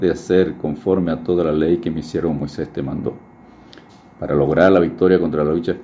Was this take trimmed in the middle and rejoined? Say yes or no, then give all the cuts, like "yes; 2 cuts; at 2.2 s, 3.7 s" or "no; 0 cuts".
no; 0 cuts